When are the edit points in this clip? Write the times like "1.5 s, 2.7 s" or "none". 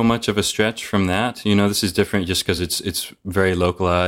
none